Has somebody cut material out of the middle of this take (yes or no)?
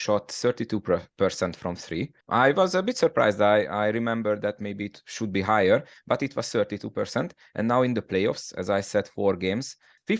yes